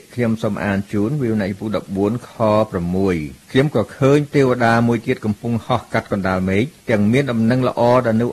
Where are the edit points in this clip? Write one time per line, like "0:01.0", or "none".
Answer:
0:03.4
0:06.8

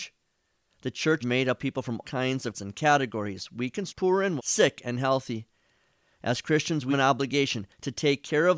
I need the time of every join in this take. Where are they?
0:01.2
0:01.6
0:02.0
0:02.5
0:03.9
0:04.4
0:06.9

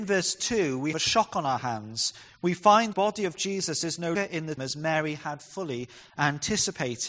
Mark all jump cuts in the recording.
0:00.9
0:02.9
0:04.1
0:04.6

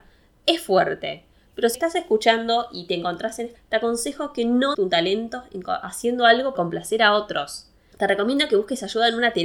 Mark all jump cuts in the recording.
0:01.7
0:03.5
0:04.7
0:06.5

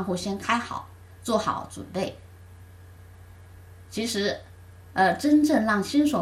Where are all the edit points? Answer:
none

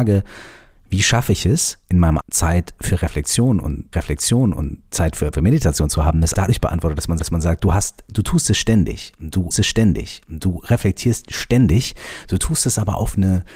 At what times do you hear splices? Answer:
0:02.2
0:03.9
0:05.3
0:06.3
0:07.2
0:09.5

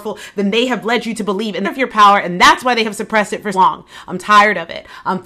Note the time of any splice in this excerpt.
0:01.6
0:03.5

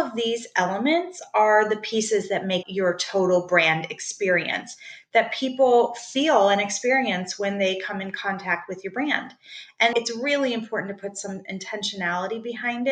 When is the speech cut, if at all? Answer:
0:02.6
0:09.9

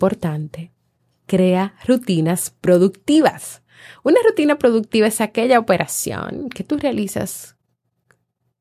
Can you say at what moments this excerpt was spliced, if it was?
none

